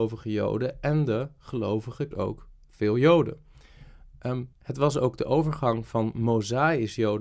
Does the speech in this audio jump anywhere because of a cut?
yes; 2 cuts; at 2.1 s, 4.5 s

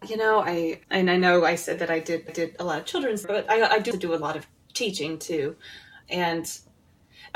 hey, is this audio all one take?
no; 3 cuts; at 2.3 s, 3.2 s, 3.9 s

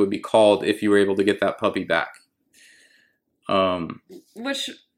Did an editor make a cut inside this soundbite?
no; 0 cuts

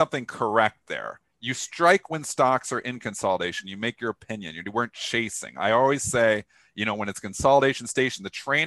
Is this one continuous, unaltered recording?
yes; 0 cuts

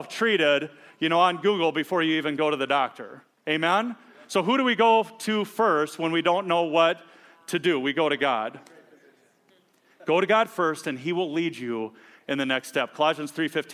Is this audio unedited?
yes; 0 cuts

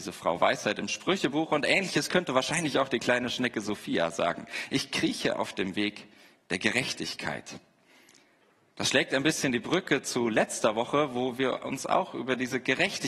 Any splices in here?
no; 0 cuts

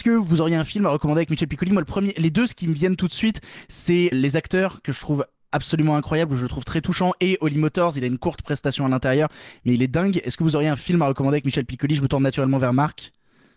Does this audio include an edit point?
yes; 1 cut; at 4.1 s

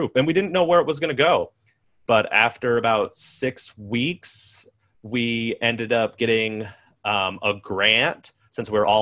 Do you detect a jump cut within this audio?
no; 0 cuts

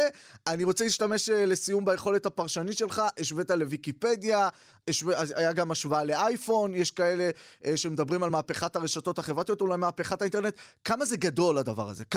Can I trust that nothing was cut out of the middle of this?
yes; 0 cuts

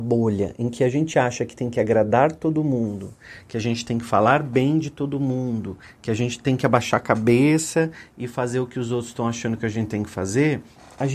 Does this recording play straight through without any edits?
yes; 0 cuts

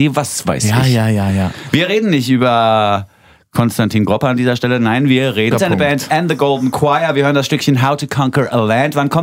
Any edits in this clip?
yes; 1 cut; at 5.5 s

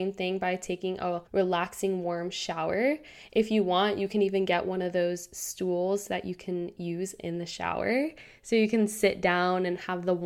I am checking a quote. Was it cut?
yes; 1 cut; at 1.3 s

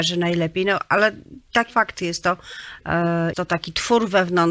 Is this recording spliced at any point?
yes; 2 cuts; at 1.7 s, 3.3 s

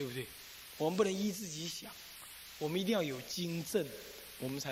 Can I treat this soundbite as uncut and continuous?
yes; 0 cuts

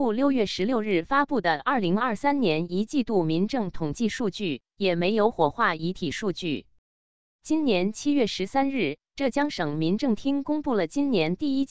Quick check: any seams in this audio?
no; 0 cuts

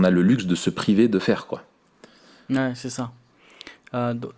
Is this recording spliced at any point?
no; 0 cuts

